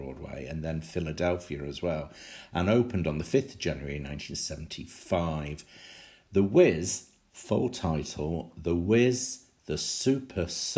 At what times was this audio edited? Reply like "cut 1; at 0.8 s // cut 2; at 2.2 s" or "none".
none